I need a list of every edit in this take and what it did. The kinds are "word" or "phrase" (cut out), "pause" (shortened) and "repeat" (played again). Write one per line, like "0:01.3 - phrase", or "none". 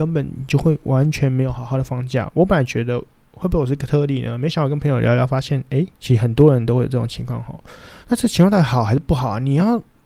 0:05.9 - pause
0:08.0 - pause